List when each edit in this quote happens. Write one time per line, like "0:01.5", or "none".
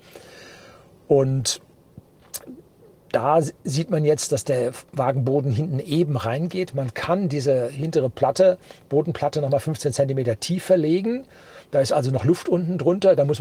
none